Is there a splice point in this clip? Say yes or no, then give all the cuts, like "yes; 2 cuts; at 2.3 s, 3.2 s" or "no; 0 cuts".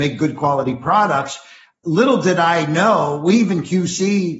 no; 0 cuts